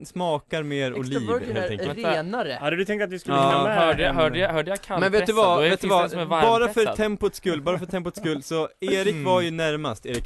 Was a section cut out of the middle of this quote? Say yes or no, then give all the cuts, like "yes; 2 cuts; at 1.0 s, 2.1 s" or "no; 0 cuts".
no; 0 cuts